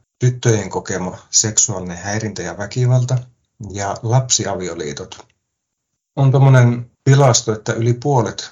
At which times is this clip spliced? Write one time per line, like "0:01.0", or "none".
none

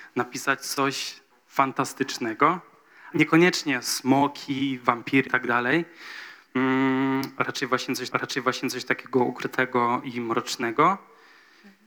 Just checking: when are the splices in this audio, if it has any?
0:01.3
0:03.1
0:05.3
0:08.1

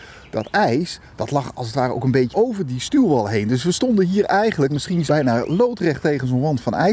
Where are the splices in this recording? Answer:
0:02.3
0:04.7
0:05.1

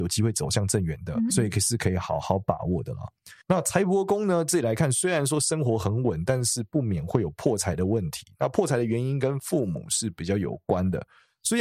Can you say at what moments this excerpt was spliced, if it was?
0:01.3
0:03.4

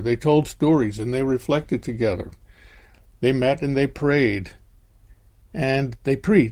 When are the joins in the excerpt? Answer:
none

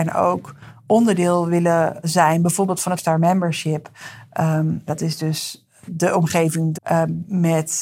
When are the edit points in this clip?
0:02.0
0:03.0
0:04.9
0:05.9
0:06.7

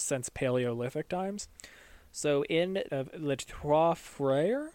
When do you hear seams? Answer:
0:02.9

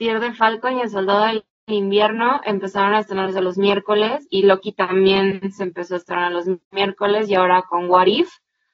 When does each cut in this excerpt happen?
0:06.6

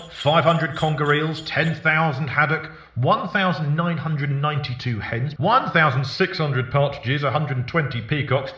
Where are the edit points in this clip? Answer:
0:05.4

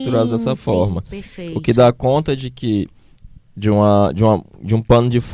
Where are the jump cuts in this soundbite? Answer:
none

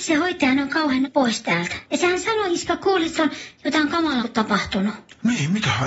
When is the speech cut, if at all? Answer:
0:01.0
0:01.8
0:03.2
0:04.2

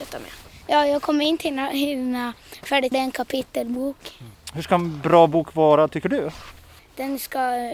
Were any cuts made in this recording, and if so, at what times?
0:02.9

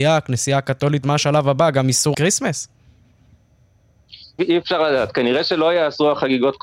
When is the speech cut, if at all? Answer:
0:01.0
0:02.1
0:04.4

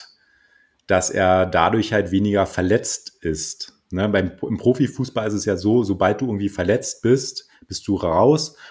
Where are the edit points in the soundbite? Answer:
none

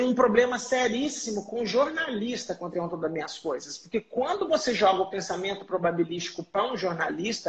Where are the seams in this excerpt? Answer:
0:02.7

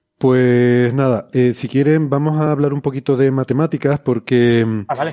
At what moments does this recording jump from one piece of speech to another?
none

